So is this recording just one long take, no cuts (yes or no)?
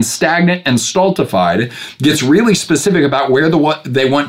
yes